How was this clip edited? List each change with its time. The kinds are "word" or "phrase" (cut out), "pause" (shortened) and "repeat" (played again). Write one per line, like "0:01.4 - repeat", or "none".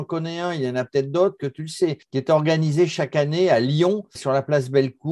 0:01.4 - word
0:02.0 - pause
0:04.1 - word